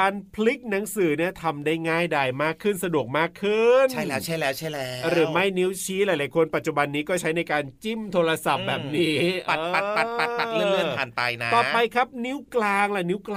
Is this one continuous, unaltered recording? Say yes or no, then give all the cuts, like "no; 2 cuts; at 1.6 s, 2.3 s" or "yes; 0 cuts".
yes; 0 cuts